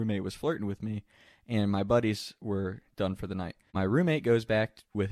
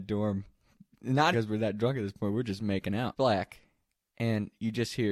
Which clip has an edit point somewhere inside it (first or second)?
second